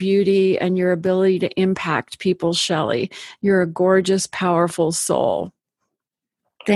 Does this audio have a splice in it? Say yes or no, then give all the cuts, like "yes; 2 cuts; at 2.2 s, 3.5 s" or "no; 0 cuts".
no; 0 cuts